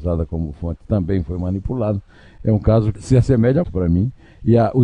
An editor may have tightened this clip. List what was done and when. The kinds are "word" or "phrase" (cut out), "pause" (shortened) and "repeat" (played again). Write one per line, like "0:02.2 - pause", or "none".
0:03.0 - word
0:03.6 - word